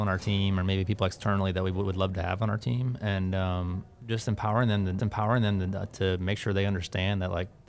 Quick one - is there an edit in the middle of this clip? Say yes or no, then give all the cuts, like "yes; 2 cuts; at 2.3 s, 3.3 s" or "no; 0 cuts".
yes; 1 cut; at 5.0 s